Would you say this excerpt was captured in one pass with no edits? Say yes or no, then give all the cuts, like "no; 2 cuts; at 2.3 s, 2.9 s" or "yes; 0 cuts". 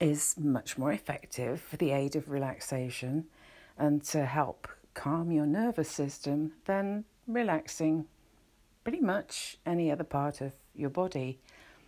yes; 0 cuts